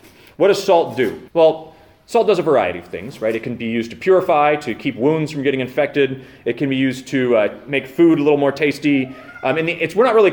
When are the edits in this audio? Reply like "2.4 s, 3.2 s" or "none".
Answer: 1.3 s